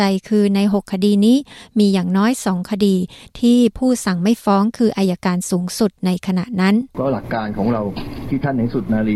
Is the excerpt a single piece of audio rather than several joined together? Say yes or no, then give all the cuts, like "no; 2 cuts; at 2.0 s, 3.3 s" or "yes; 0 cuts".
yes; 0 cuts